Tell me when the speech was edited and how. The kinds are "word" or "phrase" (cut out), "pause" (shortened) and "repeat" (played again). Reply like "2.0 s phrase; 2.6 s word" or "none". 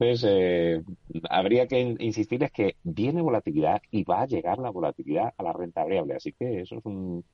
none